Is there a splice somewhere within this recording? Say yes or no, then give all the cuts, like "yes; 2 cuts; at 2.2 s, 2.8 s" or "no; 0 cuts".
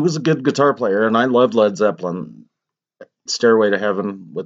yes; 1 cut; at 3.3 s